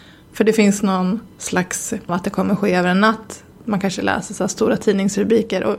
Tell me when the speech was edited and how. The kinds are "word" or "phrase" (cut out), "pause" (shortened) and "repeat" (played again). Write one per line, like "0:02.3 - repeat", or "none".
0:02.1 - phrase

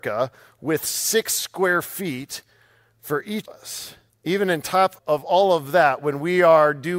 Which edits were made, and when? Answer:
0:03.4 - word
0:04.1 - pause
0:05.0 - word

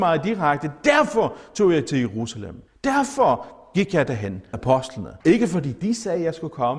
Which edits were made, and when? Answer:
0:02.7 - pause
0:04.5 - word
0:05.2 - pause

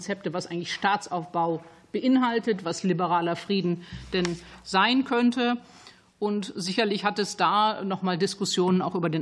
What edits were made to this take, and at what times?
none

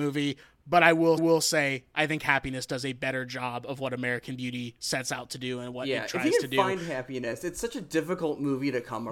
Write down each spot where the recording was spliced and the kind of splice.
0:01.2 - repeat

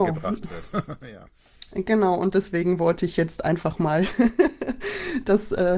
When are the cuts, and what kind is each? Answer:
none

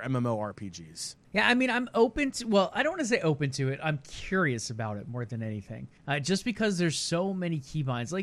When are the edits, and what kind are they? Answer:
0:01.2 - pause
0:06.0 - pause

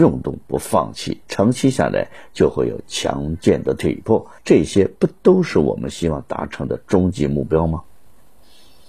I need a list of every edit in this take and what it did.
0:04.4 - pause

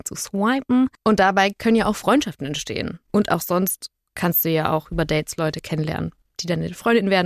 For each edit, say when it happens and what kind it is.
none

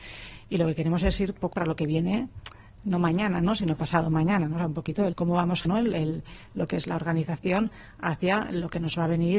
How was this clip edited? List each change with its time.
0:01.5 - phrase
0:05.1 - word
0:05.6 - word

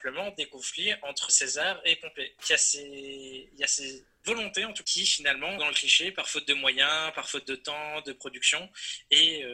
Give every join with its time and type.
0:01.3 - word
0:02.4 - word
0:04.2 - word
0:04.8 - word
0:05.6 - word

